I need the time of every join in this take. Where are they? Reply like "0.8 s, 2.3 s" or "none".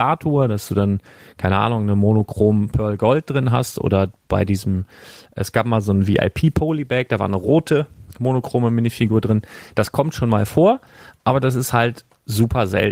none